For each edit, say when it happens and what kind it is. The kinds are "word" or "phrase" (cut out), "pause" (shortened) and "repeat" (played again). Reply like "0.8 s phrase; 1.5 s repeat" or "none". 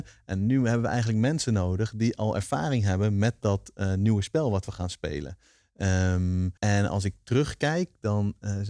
6.6 s pause